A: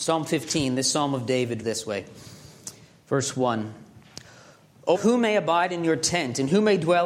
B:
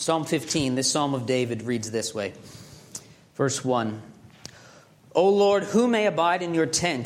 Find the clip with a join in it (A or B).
A